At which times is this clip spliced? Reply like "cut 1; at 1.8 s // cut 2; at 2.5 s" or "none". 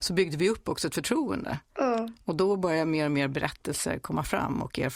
cut 1; at 1.7 s